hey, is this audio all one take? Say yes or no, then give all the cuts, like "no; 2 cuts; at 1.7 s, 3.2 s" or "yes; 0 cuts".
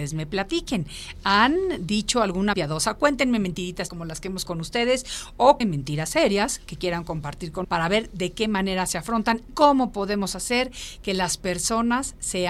no; 6 cuts; at 2.5 s, 3.9 s, 4.5 s, 5.6 s, 7.6 s, 9.5 s